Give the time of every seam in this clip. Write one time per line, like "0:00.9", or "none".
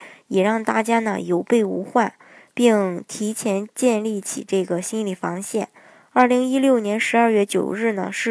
none